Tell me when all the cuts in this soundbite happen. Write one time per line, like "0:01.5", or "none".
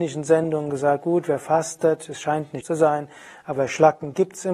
0:02.6